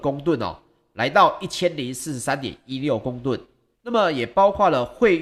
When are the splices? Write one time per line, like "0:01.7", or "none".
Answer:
0:03.7